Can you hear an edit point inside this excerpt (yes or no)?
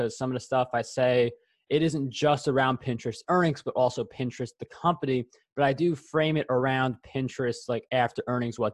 no